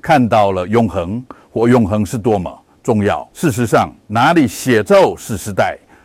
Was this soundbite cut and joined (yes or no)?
yes